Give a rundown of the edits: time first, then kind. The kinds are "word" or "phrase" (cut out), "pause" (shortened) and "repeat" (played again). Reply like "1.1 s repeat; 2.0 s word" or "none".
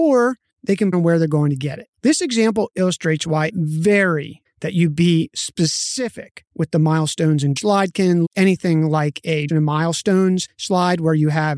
0.9 s word; 1.9 s pause; 3.5 s word; 4.5 s word; 6.5 s pause; 7.6 s phrase; 8.2 s word; 9.5 s word